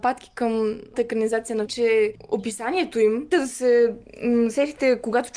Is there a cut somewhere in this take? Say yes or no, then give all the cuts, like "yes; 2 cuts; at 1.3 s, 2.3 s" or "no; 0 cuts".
yes; 3 cuts; at 0.9 s, 1.7 s, 3.3 s